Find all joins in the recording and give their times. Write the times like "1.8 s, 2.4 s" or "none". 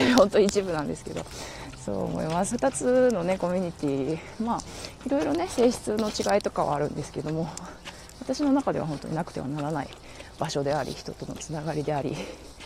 2.5 s